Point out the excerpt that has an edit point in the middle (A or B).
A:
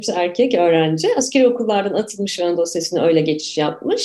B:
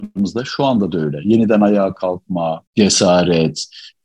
B